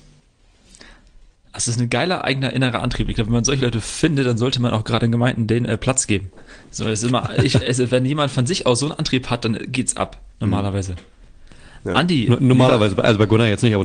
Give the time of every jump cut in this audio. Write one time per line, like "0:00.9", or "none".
0:06.6
0:10.3